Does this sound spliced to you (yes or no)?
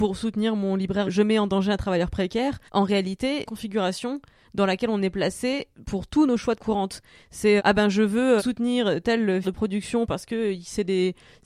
yes